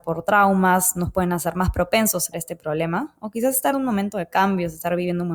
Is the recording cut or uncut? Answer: cut